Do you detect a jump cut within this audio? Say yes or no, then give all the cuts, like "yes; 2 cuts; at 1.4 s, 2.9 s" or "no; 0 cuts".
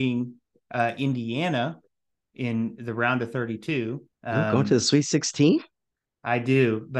yes; 2 cuts; at 2.1 s, 4.1 s